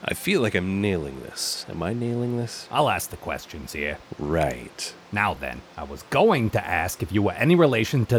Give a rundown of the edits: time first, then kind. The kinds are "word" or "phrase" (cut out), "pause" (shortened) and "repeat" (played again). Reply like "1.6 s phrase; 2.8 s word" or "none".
none

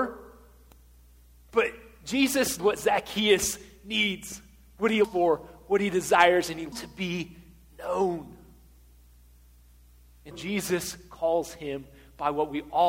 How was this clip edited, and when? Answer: 2.6 s word; 5.0 s word; 6.7 s word; 10.3 s word

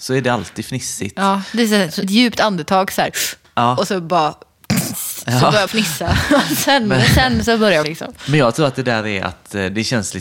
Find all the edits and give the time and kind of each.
2.0 s word; 5.7 s word; 7.8 s word

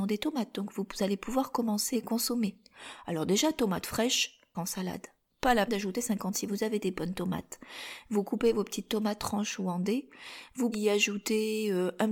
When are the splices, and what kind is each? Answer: 1.9 s word; 4.5 s word; 5.7 s word; 6.3 s word; 9.2 s word; 10.7 s word

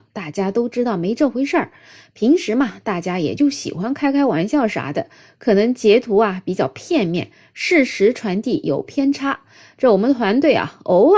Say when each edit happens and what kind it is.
none

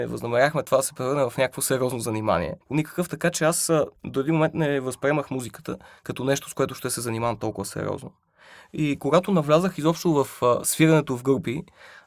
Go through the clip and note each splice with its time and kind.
2.6 s pause; 4.0 s pause

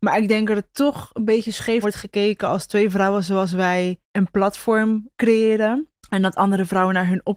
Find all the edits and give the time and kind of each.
1.8 s word; 4.0 s pause; 6.0 s pause

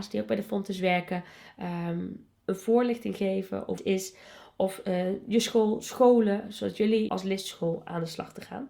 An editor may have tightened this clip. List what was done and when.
2.4 s pause; 3.8 s phrase; 7.1 s phrase

